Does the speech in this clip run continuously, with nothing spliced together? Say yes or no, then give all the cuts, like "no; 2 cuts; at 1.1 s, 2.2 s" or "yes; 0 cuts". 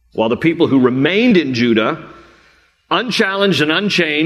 yes; 0 cuts